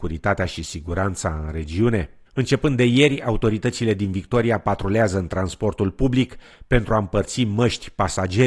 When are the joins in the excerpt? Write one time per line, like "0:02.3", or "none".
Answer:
0:02.3